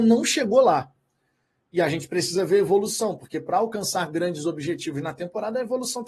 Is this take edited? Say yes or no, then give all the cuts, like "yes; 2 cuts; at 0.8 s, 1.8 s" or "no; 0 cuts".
no; 0 cuts